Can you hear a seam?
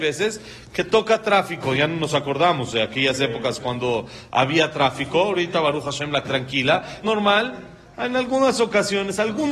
yes; 2 cuts; at 6.2 s, 7.0 s

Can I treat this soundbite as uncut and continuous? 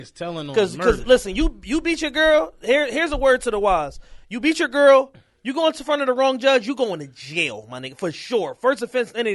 yes; 0 cuts

